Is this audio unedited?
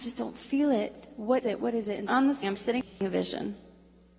no; 3 cuts; at 1.4 s, 2.1 s, 2.4 s

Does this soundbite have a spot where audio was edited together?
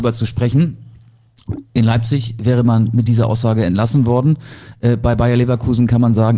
no; 0 cuts

